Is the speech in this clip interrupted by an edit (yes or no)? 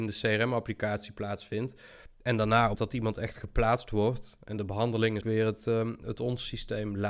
yes